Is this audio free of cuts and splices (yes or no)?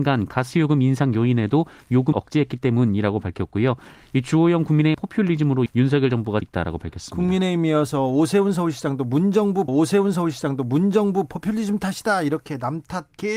no